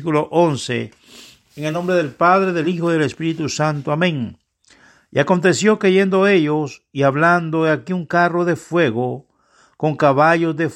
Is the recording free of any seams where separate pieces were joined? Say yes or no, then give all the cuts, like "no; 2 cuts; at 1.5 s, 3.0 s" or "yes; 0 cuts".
yes; 0 cuts